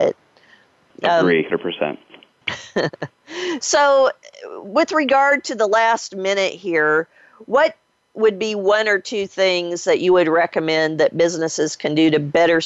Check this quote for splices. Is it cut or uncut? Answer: cut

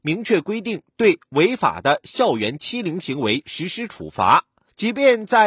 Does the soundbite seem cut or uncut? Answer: uncut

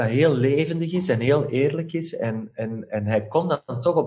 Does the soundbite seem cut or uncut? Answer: uncut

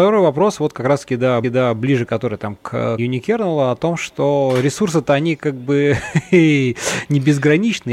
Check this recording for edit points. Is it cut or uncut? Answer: cut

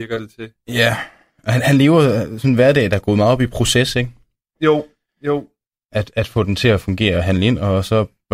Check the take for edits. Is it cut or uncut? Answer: uncut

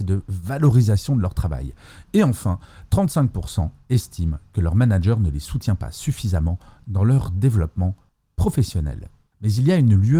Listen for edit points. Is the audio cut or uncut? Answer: uncut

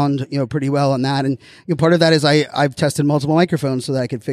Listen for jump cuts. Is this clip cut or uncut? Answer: uncut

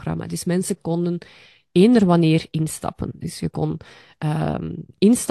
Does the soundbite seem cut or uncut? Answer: uncut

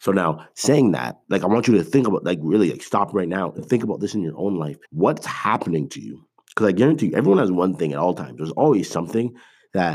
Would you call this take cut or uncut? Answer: cut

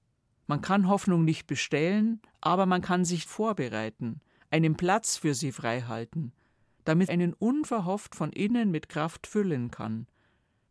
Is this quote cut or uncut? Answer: cut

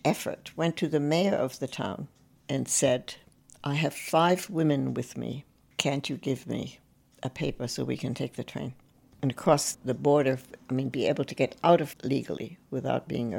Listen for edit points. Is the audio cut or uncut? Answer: cut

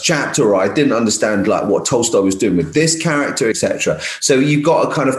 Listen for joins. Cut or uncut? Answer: cut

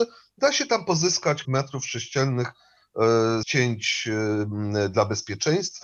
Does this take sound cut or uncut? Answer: cut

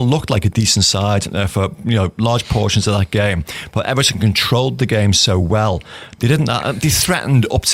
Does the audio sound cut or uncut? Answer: uncut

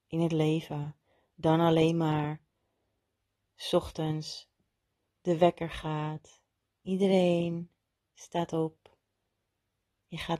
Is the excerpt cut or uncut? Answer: uncut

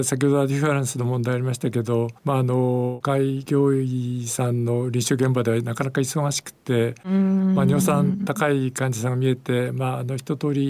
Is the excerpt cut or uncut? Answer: cut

